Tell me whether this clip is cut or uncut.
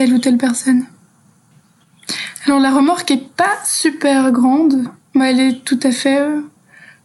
cut